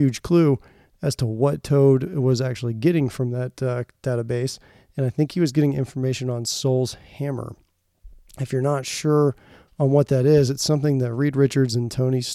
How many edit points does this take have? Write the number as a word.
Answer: zero